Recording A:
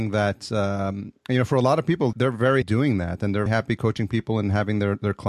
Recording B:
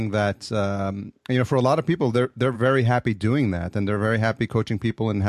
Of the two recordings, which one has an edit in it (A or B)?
A